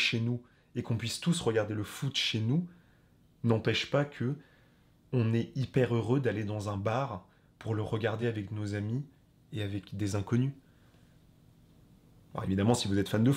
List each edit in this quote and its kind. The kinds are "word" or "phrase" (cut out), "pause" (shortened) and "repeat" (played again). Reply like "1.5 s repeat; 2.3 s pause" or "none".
none